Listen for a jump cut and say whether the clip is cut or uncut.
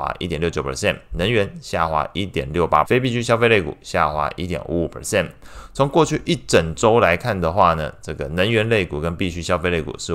cut